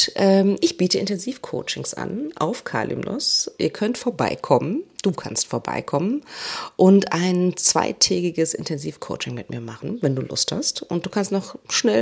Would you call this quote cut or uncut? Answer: uncut